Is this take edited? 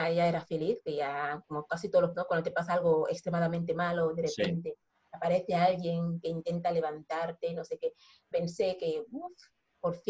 yes; 3 cuts; at 1.4 s, 2.1 s, 8.3 s

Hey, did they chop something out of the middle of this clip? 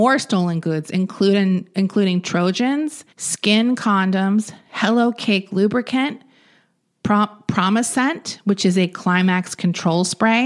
yes; 1 cut; at 3.1 s

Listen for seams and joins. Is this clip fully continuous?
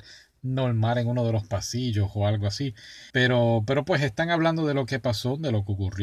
no; 1 cut; at 3.1 s

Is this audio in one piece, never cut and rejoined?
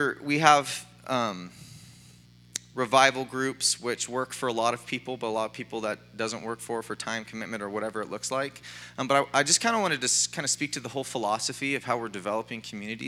yes; 0 cuts

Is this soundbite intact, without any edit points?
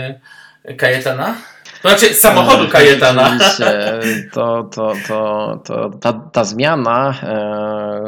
yes; 0 cuts

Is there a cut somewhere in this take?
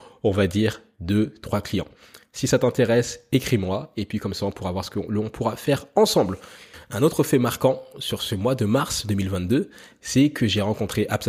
no; 0 cuts

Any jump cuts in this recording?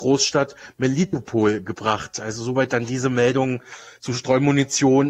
no; 0 cuts

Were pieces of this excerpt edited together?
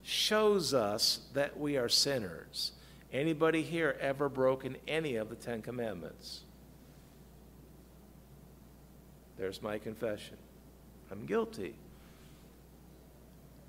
no; 0 cuts

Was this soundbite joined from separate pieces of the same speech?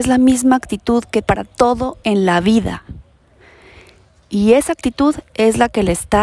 yes; 1 cut; at 1.2 s

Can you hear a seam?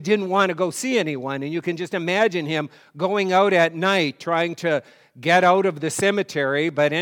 no; 0 cuts

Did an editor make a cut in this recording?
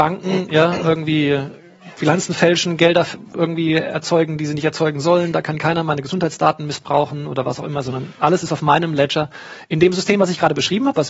no; 0 cuts

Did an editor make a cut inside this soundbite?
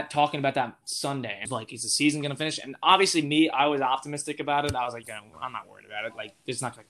yes; 2 cuts; at 1.4 s, 5.0 s

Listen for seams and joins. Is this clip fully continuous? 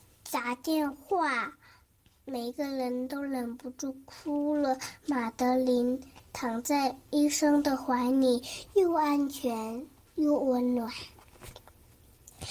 yes; 0 cuts

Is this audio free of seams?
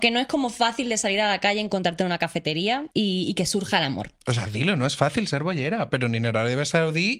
no; 1 cut; at 2.9 s

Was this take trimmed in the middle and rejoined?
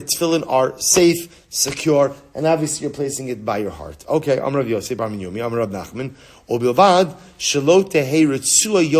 no; 0 cuts

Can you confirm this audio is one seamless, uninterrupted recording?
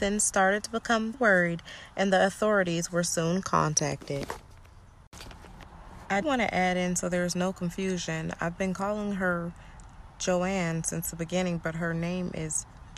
no; 2 cuts; at 1.1 s, 6.2 s

